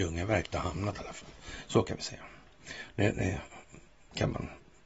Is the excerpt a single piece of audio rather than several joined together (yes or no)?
yes